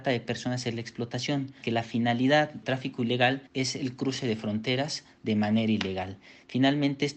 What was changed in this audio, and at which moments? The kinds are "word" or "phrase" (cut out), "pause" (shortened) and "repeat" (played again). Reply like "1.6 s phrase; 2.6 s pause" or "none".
1.6 s word; 2.6 s word; 3.5 s pause